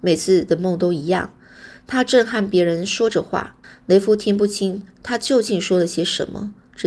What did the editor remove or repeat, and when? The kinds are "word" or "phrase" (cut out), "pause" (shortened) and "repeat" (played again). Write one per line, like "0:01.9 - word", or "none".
0:03.6 - pause